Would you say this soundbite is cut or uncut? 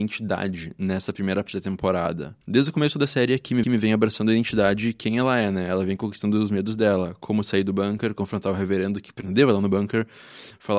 cut